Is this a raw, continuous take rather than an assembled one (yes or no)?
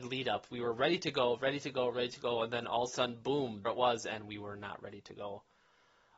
no